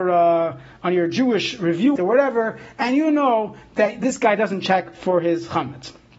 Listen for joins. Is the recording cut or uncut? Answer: cut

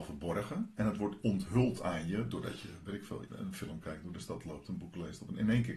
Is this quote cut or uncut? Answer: cut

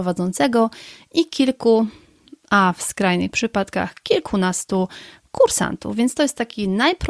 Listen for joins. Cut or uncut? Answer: uncut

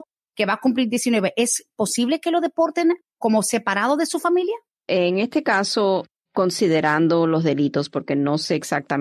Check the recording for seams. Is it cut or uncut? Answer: cut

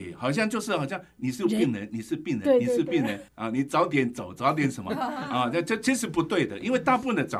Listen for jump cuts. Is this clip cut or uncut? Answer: cut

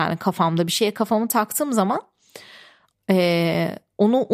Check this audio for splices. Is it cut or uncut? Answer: uncut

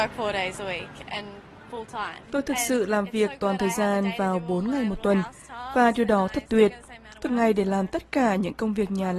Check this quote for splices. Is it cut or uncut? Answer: cut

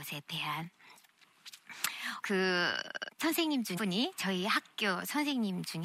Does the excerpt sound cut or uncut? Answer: cut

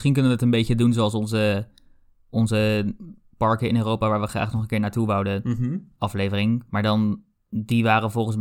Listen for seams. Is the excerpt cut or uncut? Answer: uncut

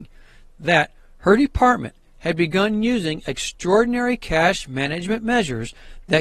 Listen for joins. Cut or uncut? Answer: uncut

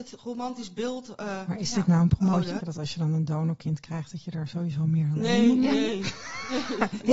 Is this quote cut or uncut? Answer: cut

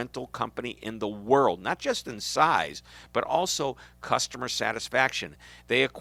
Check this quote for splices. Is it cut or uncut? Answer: uncut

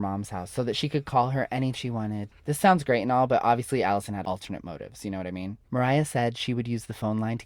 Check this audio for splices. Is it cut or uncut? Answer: cut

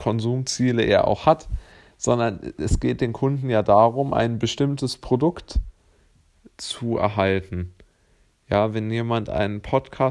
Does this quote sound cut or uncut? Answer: uncut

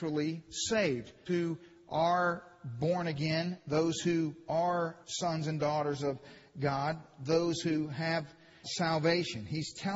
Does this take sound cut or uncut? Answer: cut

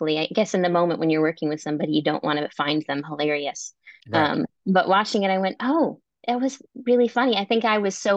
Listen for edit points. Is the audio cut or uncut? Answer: cut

